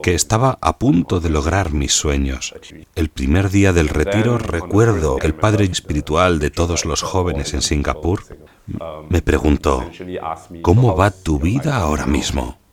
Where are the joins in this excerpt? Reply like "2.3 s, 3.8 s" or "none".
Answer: 2.8 s, 5.2 s, 5.7 s

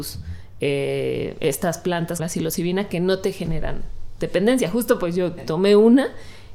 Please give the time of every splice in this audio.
2.2 s, 5.4 s

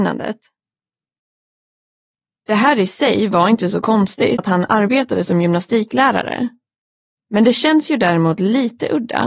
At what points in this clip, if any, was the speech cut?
4.4 s

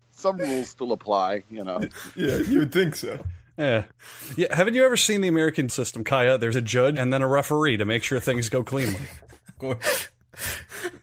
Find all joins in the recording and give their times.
5.7 s, 6.5 s, 7.0 s, 9.6 s

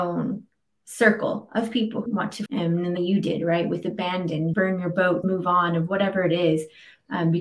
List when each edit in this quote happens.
2.1 s, 2.5 s, 3.0 s, 4.5 s, 5.2 s

